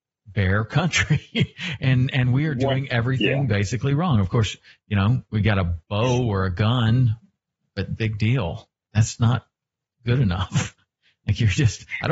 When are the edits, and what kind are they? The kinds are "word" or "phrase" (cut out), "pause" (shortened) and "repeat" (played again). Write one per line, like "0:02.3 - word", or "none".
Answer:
0:08.9 - word